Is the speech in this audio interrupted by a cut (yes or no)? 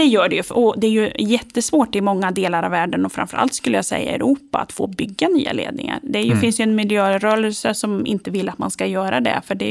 no